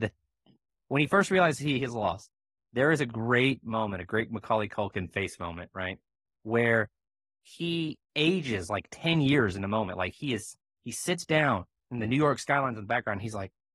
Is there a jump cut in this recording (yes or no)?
no